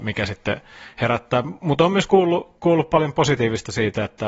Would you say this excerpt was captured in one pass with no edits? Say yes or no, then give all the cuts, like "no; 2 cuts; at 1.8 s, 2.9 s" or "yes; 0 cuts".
yes; 0 cuts